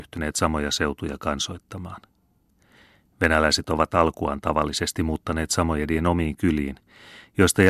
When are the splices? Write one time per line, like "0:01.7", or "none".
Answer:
none